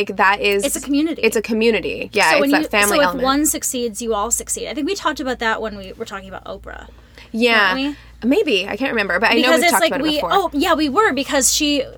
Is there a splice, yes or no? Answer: no